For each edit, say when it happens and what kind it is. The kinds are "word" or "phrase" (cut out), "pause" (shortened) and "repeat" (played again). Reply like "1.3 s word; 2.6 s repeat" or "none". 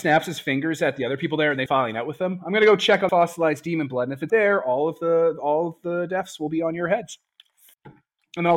1.7 s word; 3.1 s word; 4.3 s word

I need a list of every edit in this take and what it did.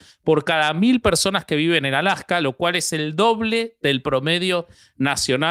none

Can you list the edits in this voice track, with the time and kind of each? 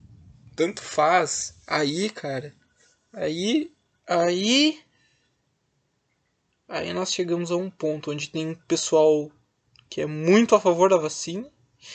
none

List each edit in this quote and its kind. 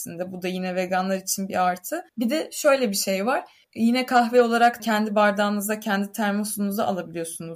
2.1 s pause; 3.6 s pause; 4.8 s word

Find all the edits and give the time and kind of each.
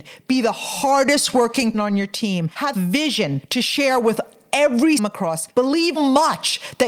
1.7 s word; 2.7 s word; 5.0 s phrase; 6.0 s word

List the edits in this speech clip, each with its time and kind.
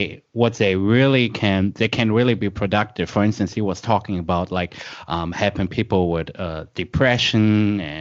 none

